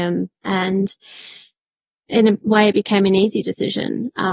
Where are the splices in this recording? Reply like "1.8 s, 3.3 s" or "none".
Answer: none